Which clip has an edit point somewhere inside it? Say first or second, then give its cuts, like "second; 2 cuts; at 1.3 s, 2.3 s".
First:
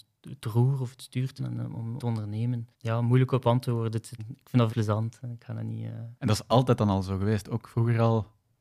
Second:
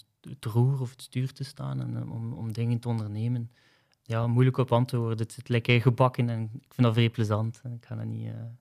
first; 6 cuts; at 1.4 s, 2.0 s, 2.7 s, 4.2 s, 4.7 s, 6.2 s